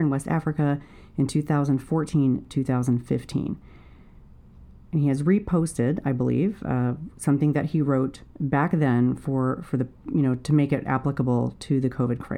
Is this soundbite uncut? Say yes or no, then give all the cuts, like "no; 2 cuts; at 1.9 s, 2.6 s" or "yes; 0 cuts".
no; 2 cuts; at 4.8 s, 8.3 s